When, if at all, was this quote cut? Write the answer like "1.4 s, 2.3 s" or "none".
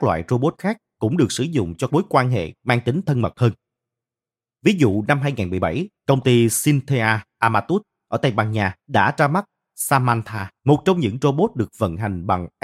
1.9 s, 6.0 s, 8.8 s, 10.6 s